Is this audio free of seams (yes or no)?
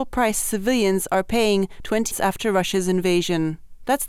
no